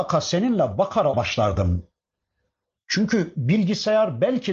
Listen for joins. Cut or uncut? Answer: cut